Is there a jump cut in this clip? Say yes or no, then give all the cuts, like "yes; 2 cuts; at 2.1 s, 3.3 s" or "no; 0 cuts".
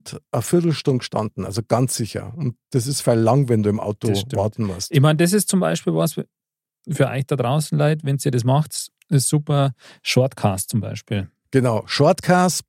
no; 0 cuts